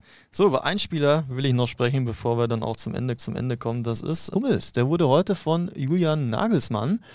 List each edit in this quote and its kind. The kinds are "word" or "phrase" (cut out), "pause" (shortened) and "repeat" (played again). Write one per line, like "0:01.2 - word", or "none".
0:03.2 - repeat
0:04.3 - word